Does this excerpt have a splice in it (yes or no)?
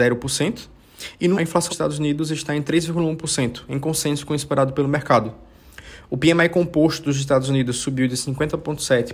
yes